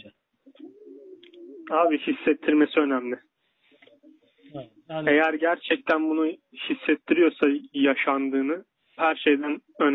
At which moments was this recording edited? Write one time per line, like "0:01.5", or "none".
0:09.0